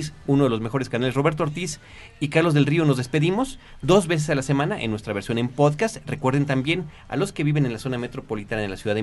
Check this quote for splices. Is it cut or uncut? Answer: uncut